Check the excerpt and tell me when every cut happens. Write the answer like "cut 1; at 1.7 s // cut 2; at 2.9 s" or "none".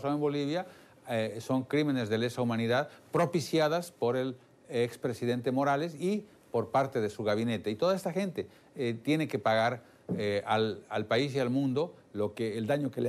none